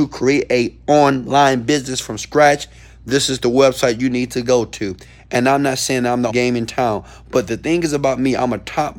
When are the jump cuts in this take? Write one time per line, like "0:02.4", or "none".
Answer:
0:06.3